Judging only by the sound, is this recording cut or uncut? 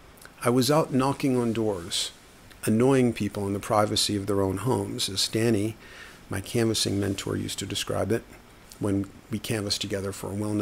uncut